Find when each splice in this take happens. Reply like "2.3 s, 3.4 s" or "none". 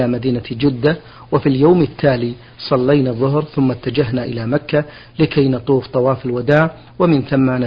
none

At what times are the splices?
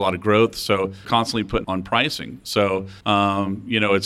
1.0 s, 1.6 s, 3.0 s

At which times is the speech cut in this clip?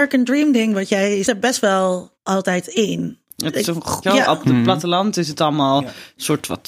1.2 s, 2.1 s, 4.0 s

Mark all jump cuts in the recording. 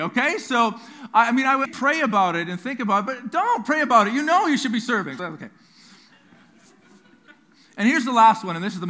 1.6 s, 5.2 s

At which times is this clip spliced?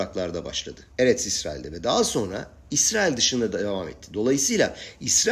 0.9 s

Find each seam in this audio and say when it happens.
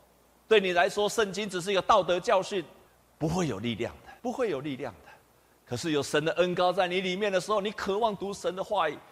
2.9 s, 4.2 s

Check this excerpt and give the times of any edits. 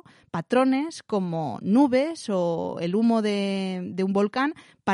none

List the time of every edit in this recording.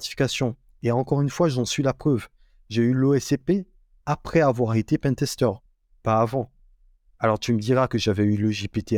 none

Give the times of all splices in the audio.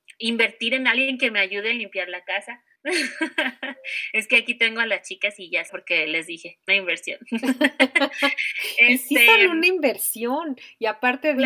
2.8 s, 5.7 s, 6.7 s

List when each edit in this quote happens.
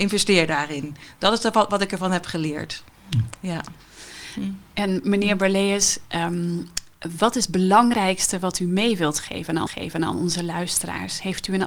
9.7 s

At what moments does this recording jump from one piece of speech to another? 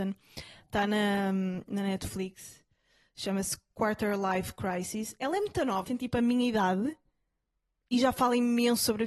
5.8 s

